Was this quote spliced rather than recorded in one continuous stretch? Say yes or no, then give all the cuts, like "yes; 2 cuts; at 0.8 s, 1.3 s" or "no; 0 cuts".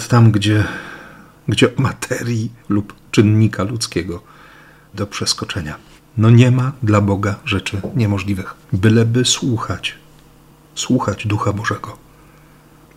yes; 5 cuts; at 1.8 s, 2.6 s, 4.9 s, 6.0 s, 8.6 s